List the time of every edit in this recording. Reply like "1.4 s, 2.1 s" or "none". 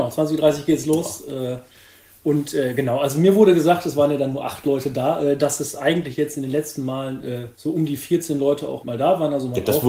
7.5 s, 8.8 s